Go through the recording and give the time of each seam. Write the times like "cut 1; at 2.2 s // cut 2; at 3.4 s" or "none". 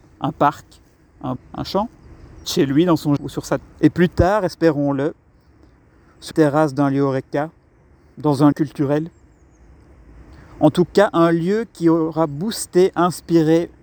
cut 1; at 1.4 s // cut 2; at 2.4 s // cut 3; at 3.2 s // cut 4; at 3.6 s // cut 5; at 6.3 s // cut 6; at 8.5 s